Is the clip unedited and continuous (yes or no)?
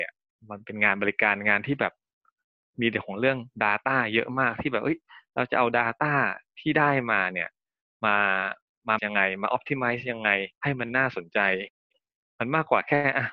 no